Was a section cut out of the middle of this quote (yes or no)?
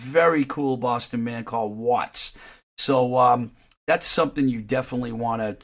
no